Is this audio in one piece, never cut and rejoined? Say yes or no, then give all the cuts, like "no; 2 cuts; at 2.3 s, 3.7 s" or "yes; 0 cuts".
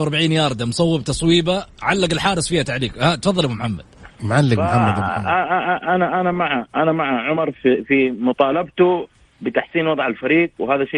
no; 1 cut; at 9.2 s